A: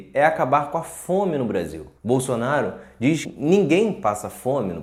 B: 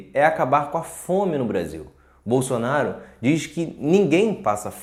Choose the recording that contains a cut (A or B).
A